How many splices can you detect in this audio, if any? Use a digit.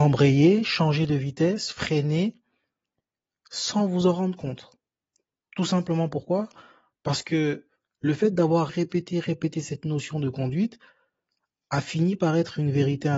1